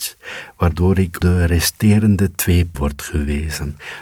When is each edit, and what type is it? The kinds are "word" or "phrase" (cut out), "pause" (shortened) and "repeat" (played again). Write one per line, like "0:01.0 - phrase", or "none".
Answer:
0:01.2 - word
0:02.7 - word